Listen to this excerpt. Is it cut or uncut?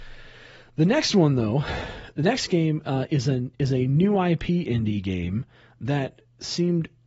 uncut